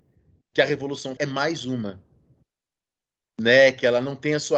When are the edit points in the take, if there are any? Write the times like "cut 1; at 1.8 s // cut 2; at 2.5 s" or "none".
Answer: cut 1; at 1.2 s